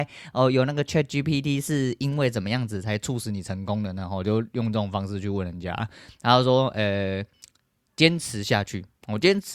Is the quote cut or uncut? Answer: uncut